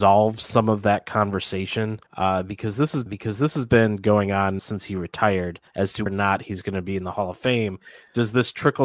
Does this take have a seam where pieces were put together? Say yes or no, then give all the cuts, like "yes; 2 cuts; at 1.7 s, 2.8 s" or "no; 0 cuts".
yes; 5 cuts; at 2.1 s, 3.1 s, 4.6 s, 5.7 s, 6.1 s